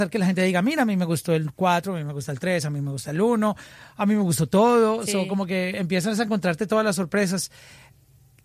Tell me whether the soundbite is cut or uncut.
uncut